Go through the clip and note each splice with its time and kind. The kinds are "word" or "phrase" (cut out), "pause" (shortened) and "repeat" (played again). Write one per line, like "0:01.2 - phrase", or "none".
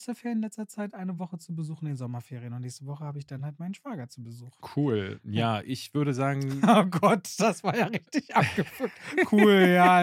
none